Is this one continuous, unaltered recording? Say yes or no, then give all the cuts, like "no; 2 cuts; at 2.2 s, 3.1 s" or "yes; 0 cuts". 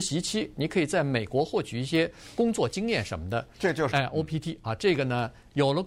no; 2 cuts; at 3.5 s, 3.9 s